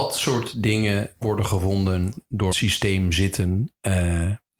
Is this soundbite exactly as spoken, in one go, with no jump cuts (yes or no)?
no